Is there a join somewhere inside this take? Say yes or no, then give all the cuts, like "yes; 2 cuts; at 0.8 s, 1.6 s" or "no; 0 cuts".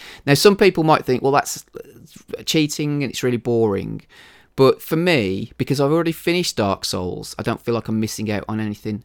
no; 0 cuts